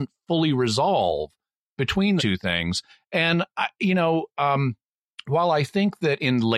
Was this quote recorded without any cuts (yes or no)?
no